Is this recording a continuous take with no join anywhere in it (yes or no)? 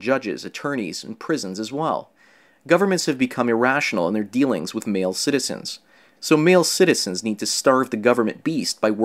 yes